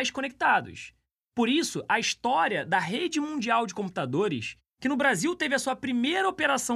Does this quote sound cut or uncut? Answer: uncut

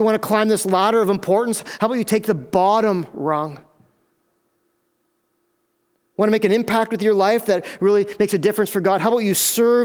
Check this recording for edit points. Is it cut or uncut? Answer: uncut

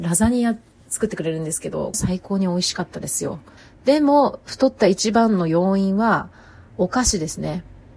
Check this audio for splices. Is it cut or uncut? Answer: cut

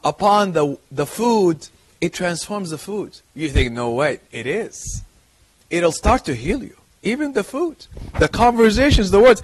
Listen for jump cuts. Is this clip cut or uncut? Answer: cut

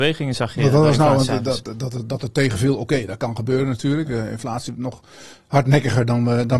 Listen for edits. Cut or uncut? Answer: uncut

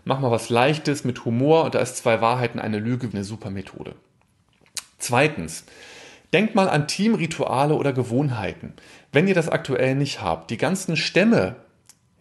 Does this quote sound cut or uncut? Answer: cut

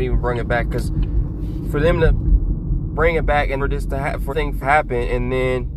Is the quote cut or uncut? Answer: cut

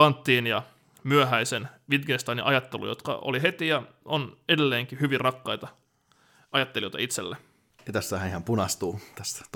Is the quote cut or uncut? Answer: uncut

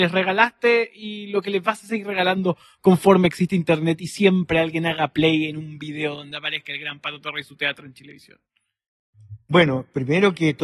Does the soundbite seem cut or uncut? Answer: uncut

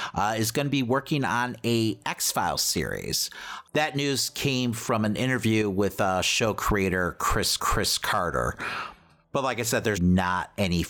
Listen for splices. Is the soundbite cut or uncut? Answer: cut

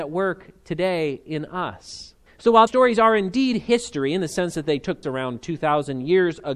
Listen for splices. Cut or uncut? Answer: cut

